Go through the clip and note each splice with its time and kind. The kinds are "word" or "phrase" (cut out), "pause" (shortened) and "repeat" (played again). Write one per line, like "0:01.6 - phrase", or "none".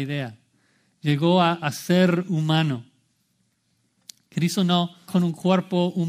0:05.1 - word

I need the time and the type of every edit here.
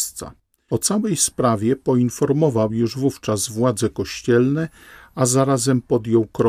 none

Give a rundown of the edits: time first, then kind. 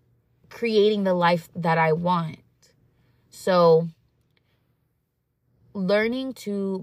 none

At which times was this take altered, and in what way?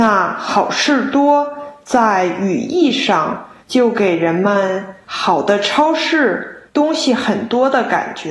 0:03.6 - pause
0:05.0 - pause
0:06.7 - pause

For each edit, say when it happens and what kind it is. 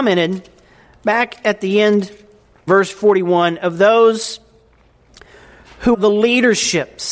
0:02.7 - word
0:05.9 - word

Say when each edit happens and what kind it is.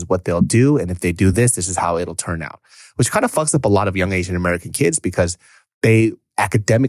none

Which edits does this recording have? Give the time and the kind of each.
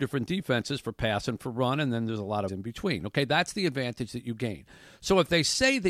0:02.5 - phrase

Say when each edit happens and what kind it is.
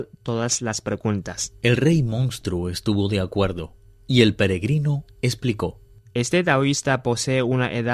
none

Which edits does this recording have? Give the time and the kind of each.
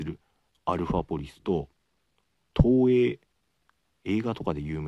none

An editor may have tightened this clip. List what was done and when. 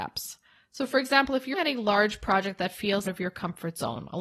0:01.5 - word
0:03.1 - word

